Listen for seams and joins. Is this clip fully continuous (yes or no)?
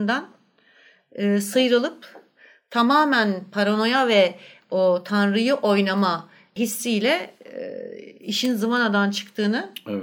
yes